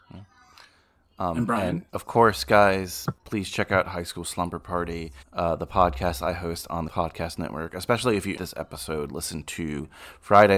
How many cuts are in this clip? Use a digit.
5